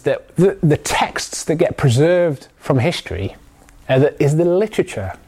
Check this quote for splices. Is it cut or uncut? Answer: uncut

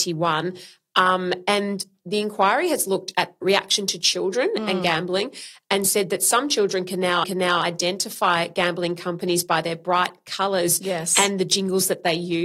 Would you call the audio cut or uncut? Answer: cut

